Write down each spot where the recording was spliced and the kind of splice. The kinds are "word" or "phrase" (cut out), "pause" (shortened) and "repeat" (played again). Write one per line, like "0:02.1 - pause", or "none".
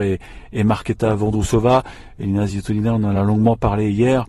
none